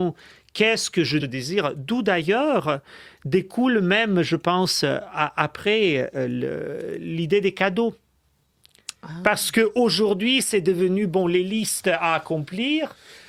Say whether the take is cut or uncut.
cut